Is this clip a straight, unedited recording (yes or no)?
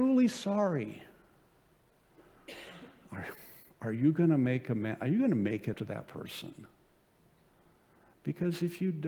no